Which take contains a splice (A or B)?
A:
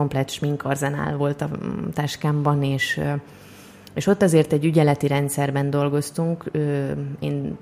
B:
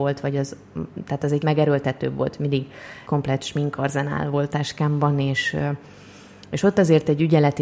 B